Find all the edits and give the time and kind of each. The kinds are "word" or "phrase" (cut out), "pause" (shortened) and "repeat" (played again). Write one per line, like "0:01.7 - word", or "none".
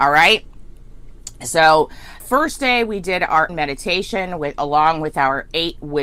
0:02.2 - word
0:03.5 - word